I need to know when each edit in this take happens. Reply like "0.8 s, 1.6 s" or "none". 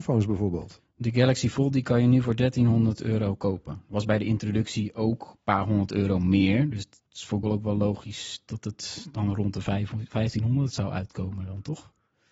7.1 s, 7.4 s